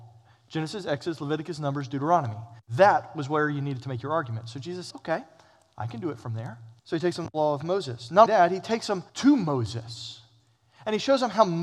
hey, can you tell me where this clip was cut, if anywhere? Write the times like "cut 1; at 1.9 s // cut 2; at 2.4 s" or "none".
cut 1; at 2.6 s // cut 2; at 4.9 s // cut 3; at 6.8 s // cut 4; at 8.3 s // cut 5; at 9.1 s